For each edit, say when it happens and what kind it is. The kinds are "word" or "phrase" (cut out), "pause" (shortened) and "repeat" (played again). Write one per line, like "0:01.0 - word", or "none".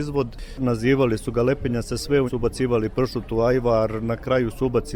0:02.3 - word